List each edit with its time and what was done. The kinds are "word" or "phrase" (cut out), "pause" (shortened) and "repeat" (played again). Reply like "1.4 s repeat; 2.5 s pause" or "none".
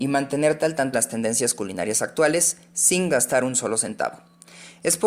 0.9 s word